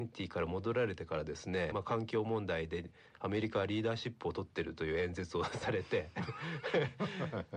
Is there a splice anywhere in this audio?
yes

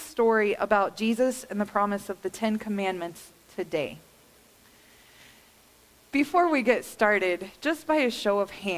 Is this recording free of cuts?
yes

